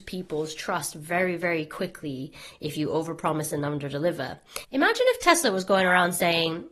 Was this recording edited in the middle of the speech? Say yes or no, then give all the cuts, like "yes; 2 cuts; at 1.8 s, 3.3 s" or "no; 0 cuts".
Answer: no; 0 cuts